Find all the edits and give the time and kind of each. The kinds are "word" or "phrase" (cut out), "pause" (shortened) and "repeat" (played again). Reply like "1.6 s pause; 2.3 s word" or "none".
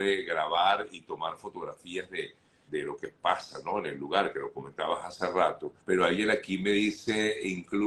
2.7 s word; 5.8 s pause